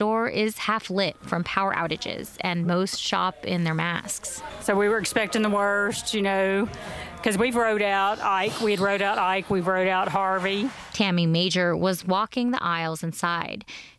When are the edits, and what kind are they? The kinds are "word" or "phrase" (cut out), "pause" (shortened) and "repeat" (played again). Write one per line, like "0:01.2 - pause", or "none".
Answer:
none